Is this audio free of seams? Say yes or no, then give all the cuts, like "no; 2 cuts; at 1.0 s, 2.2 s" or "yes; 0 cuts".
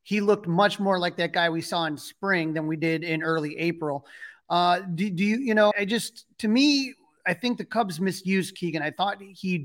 no; 1 cut; at 5.7 s